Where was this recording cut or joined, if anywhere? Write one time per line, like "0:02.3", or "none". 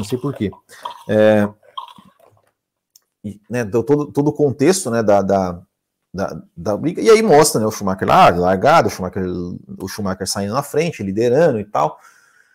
none

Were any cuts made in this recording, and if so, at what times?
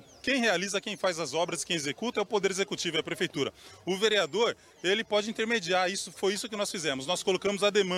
none

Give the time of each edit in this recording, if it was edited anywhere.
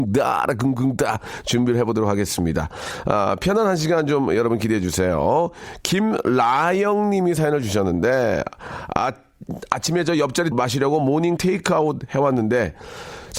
0:10.5
0:11.4

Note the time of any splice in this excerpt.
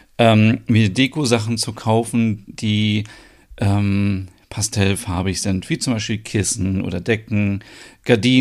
none

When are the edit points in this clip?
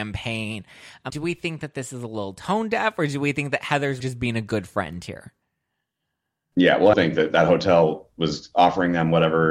0:01.1
0:04.0
0:06.9

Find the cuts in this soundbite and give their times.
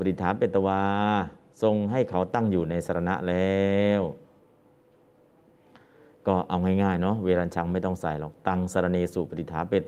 none

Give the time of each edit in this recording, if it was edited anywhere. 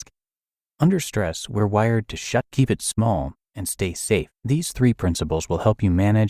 0:02.4
0:04.3

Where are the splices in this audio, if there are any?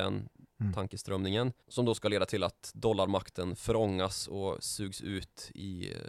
0:01.6

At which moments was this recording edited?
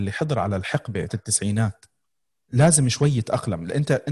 0:01.1
0:02.2

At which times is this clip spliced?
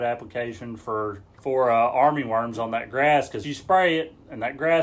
0:01.4
0:03.4

